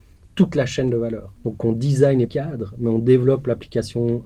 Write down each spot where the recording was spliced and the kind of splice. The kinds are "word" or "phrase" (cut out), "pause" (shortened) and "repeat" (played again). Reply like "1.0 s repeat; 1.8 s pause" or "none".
1.4 s pause; 2.3 s phrase